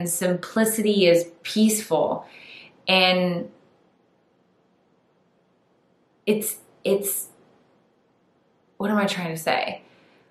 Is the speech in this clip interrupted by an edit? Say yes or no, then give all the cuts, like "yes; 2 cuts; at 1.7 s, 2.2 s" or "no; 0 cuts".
no; 0 cuts